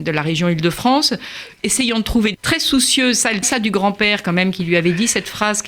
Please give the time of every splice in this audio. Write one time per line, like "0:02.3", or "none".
0:02.3
0:03.4